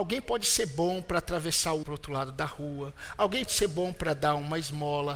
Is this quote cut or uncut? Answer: cut